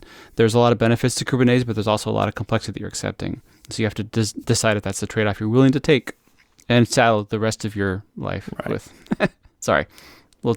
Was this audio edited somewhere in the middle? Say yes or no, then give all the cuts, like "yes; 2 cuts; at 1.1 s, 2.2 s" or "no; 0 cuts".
no; 0 cuts